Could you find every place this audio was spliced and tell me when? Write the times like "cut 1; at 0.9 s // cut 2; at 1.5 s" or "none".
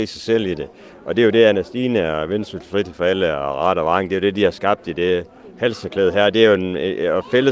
none